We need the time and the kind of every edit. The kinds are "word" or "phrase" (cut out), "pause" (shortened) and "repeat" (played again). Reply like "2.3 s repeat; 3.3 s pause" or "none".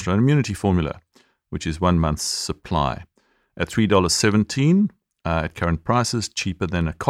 none